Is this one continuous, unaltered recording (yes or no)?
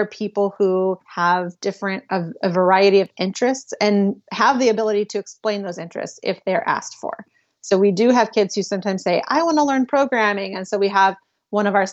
no